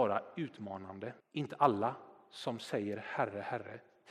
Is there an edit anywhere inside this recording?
yes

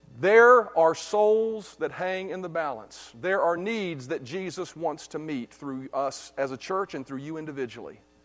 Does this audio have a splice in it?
no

